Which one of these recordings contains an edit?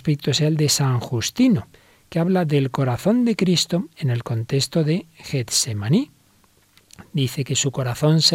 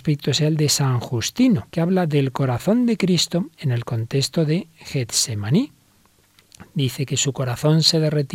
second; 1 cut; at 1.7 s

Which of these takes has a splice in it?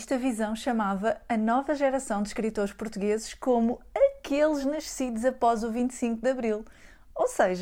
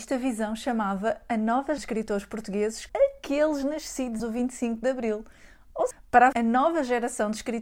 second; 5 cuts; at 1.8 s, 2.9 s, 4.2 s, 5.9 s, 6.3 s

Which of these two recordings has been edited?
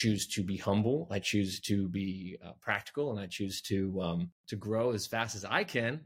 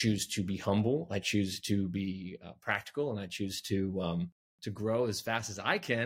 first; 1 cut; at 4.4 s

